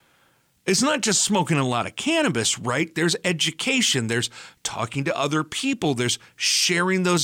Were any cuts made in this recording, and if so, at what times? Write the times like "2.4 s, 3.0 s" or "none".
none